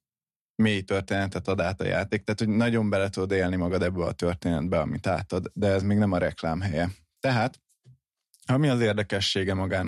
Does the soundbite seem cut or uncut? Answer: uncut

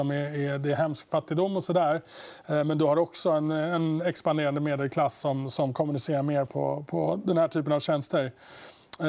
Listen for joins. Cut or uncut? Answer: uncut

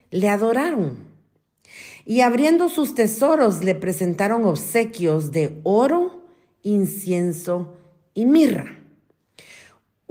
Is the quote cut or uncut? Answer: uncut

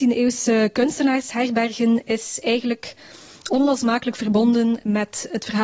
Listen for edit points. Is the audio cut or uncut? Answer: uncut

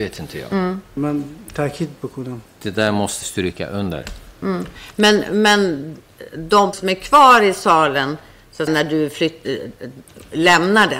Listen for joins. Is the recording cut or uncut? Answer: cut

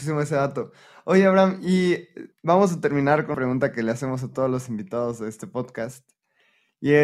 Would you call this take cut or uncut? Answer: cut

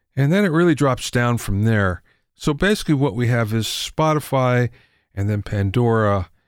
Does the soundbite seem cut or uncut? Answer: uncut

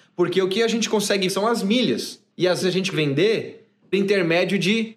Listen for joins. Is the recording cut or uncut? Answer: cut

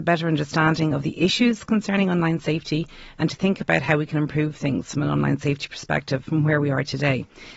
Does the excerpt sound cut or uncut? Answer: uncut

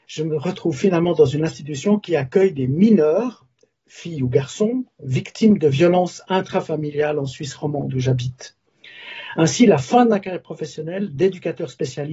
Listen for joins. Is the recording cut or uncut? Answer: uncut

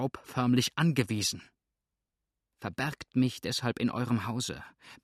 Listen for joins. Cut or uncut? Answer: uncut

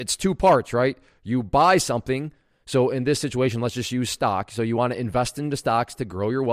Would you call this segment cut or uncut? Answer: uncut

